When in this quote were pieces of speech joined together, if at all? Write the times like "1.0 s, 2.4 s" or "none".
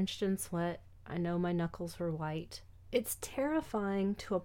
none